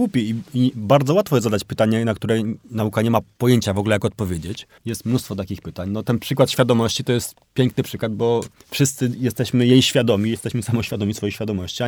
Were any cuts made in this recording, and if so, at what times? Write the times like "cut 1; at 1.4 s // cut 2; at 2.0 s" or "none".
cut 1; at 4.8 s